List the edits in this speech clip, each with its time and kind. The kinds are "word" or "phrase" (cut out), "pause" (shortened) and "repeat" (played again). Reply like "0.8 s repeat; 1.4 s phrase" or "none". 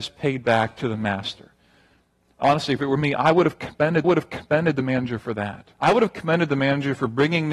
4.0 s repeat; 5.7 s pause

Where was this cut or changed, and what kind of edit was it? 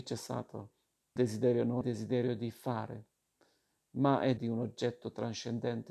1.2 s word; 1.8 s word; 4.4 s word

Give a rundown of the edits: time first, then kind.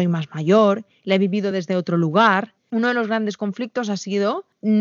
none

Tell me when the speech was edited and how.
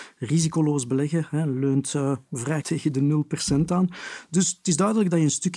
2.6 s word

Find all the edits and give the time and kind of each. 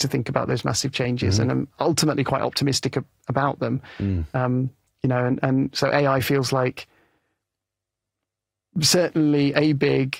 none

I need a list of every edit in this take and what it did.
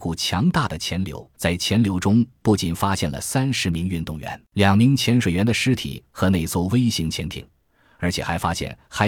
1.3 s pause; 4.5 s pause

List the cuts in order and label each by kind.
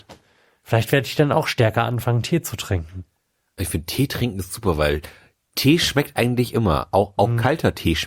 none

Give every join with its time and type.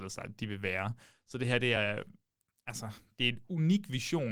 none

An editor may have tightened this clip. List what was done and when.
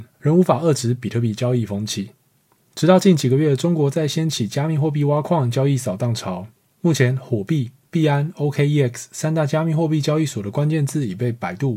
none

